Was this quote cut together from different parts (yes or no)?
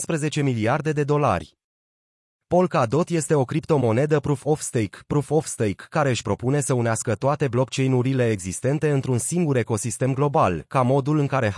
no